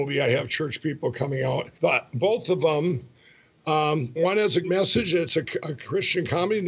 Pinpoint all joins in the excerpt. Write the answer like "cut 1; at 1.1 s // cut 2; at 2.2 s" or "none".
cut 1; at 1.8 s // cut 2; at 4.2 s // cut 3; at 4.6 s